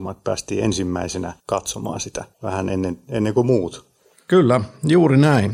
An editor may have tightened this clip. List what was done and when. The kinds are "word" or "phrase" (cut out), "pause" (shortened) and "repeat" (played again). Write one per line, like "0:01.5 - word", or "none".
0:01.4 - pause
0:02.3 - pause